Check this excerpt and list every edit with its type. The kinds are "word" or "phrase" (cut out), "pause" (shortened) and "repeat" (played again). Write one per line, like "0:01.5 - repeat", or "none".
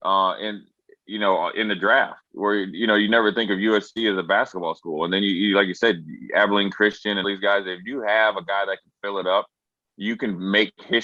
0:07.2 - word